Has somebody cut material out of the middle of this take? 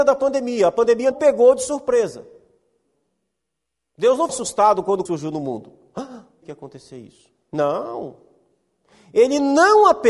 yes; 4 cuts; at 1.1 s, 4.3 s, 5.1 s, 6.4 s

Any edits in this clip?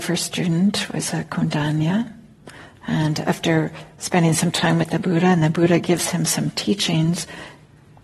no; 0 cuts

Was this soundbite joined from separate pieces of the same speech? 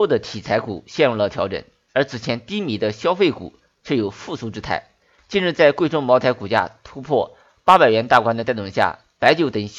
no; 0 cuts

